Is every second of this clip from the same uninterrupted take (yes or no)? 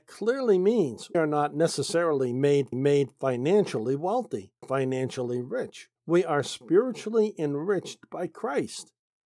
no